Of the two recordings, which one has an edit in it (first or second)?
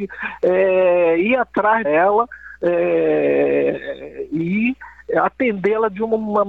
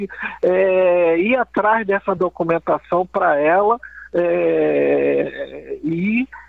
first